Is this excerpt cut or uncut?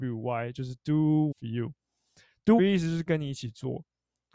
cut